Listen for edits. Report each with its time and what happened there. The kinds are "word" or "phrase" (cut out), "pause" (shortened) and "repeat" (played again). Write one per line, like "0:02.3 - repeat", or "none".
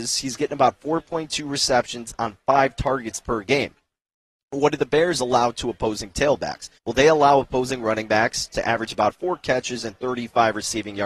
0:06.8 - pause